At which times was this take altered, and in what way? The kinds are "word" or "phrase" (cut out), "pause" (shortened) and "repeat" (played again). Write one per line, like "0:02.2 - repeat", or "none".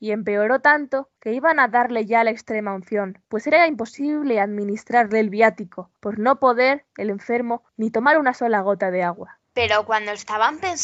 0:01.2 - pause
0:03.2 - pause
0:06.0 - pause
0:07.7 - pause
0:09.4 - pause